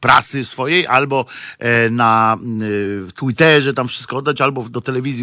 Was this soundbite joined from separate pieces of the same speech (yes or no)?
no